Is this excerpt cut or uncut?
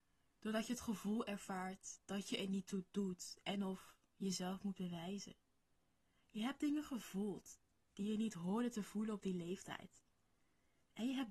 uncut